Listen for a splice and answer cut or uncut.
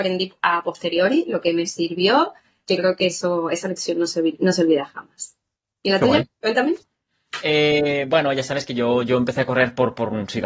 uncut